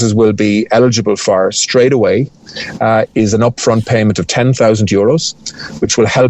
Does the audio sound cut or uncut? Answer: uncut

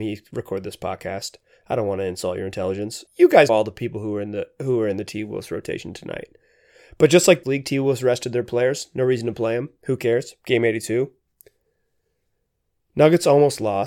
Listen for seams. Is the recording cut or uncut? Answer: cut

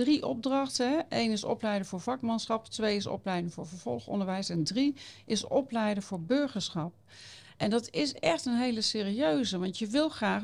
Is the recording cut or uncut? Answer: uncut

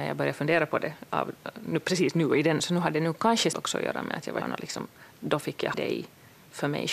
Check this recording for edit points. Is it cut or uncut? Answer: cut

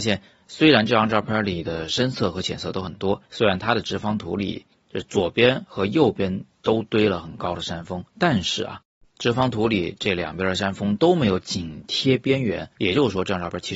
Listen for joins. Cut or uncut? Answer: cut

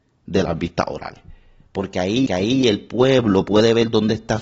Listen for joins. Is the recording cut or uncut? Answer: cut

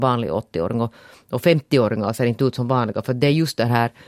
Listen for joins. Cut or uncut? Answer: uncut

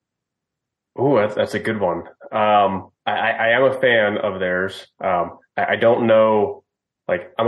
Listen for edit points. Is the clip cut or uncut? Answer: cut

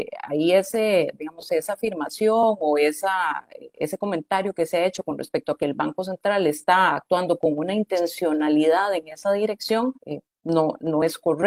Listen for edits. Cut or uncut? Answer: cut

